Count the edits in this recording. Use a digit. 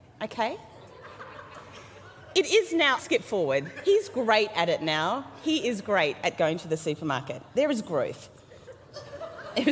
1